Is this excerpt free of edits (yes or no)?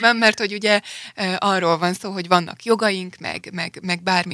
yes